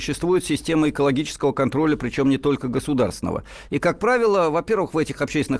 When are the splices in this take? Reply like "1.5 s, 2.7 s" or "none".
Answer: none